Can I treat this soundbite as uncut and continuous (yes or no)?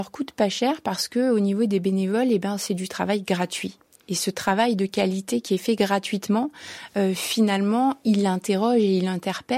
yes